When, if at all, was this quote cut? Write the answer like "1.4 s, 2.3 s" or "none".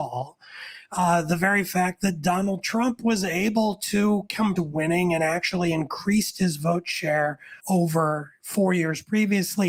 4.6 s, 7.6 s